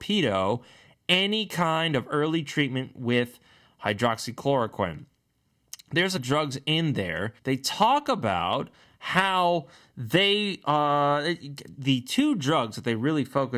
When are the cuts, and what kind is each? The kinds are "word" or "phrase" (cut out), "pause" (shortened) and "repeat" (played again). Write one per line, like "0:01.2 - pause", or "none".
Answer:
0:06.2 - phrase
0:07.4 - pause
0:11.7 - word